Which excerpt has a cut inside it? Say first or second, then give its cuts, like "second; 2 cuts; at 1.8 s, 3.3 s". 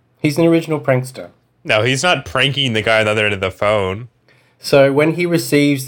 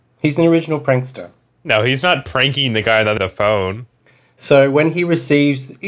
second; 1 cut; at 3.2 s